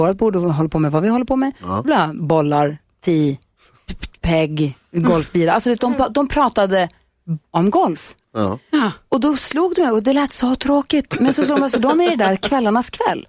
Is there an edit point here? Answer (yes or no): yes